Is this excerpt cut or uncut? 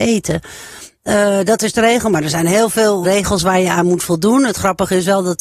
cut